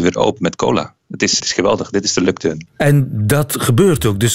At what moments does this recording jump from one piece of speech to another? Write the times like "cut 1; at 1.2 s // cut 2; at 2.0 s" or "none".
cut 1; at 1.4 s // cut 2; at 2.7 s

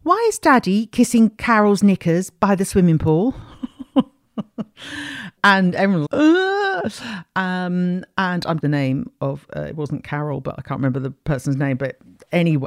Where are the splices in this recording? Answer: cut 1; at 5.4 s // cut 2; at 6.1 s // cut 3; at 8.6 s

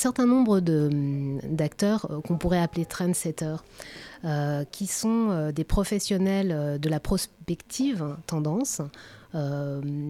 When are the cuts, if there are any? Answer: none

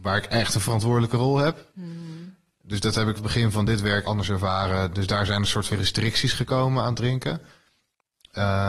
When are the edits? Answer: cut 1; at 3.2 s // cut 2; at 4.0 s // cut 3; at 5.7 s

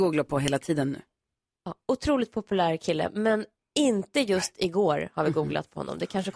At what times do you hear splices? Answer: none

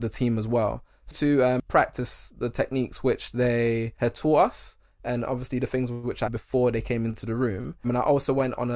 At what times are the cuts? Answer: cut 1; at 1.1 s // cut 2; at 6.3 s

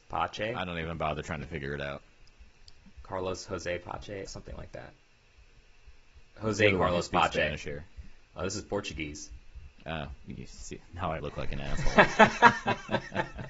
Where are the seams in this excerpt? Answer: cut 1; at 4.3 s // cut 2; at 10.9 s // cut 3; at 11.2 s

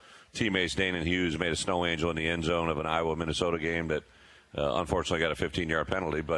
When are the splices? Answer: none

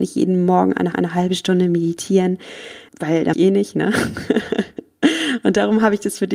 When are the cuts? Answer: cut 1; at 0.9 s // cut 2; at 2.9 s // cut 3; at 3.3 s

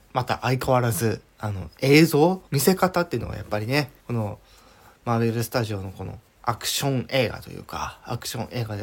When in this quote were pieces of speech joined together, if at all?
cut 1; at 2.5 s // cut 2; at 4.0 s

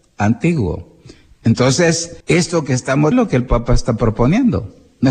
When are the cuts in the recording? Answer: cut 1; at 2.2 s // cut 2; at 3.1 s

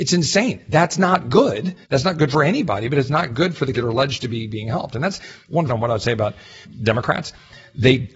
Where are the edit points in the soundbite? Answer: cut 1; at 1.8 s // cut 2; at 3.7 s // cut 3; at 5.7 s

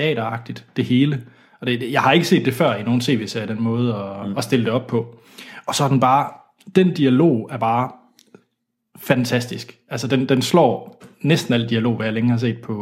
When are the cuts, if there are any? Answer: none

